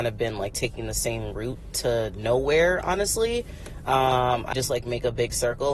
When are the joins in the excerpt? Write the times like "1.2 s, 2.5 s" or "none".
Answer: 4.5 s